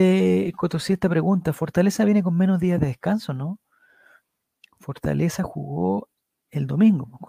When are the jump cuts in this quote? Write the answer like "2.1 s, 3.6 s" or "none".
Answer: none